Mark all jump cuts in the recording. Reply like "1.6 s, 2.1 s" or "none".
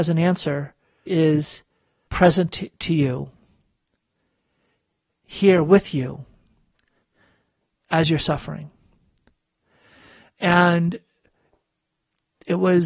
1.1 s, 2.1 s